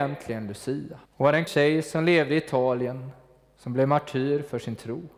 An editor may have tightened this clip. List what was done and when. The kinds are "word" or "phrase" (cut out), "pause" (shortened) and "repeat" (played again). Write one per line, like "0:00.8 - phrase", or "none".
0:01.0 - pause
0:01.5 - word